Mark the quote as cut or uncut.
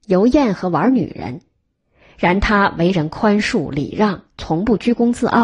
uncut